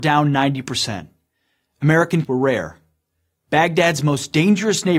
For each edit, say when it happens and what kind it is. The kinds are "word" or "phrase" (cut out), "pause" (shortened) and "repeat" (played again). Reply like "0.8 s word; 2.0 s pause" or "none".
2.2 s word